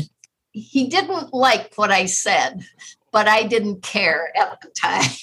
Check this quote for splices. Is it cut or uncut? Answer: cut